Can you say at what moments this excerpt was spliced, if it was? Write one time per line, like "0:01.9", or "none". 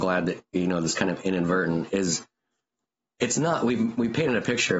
none